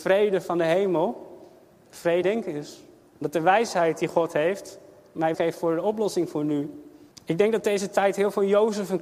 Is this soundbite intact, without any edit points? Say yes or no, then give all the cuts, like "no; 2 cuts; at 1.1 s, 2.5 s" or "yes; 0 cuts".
no; 3 cuts; at 2.2 s, 5.3 s, 7.1 s